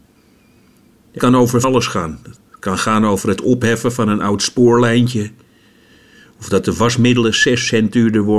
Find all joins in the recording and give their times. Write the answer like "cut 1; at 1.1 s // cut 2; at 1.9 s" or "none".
cut 1; at 1.2 s // cut 2; at 1.6 s